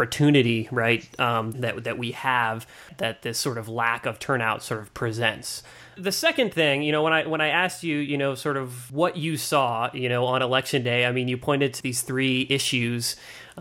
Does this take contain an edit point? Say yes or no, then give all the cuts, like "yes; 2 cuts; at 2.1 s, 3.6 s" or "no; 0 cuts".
yes; 1 cut; at 1.5 s